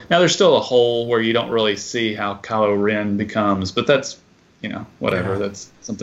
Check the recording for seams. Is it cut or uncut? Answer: uncut